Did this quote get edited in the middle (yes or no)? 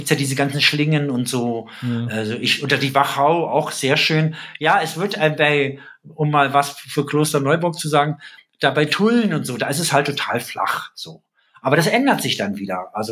no